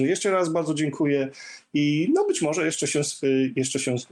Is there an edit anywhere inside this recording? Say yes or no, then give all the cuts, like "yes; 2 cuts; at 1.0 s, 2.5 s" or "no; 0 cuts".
no; 0 cuts